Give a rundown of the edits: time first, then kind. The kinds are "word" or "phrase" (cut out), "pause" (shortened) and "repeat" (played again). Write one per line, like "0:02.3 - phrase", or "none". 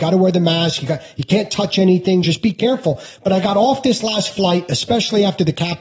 none